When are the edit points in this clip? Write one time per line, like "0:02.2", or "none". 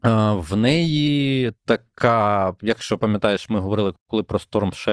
0:01.6